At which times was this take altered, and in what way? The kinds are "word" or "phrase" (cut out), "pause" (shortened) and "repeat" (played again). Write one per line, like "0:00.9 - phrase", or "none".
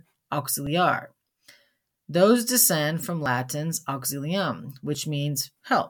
none